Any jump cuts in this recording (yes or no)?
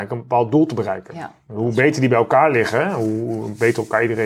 no